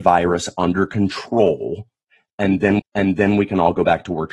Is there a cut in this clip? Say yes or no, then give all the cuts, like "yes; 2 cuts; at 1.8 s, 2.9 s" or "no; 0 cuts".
yes; 1 cut; at 2.8 s